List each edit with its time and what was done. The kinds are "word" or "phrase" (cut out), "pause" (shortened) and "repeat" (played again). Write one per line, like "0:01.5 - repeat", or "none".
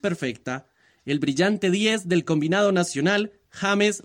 none